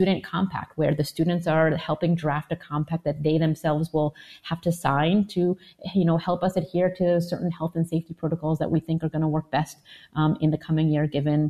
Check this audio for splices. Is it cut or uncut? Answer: uncut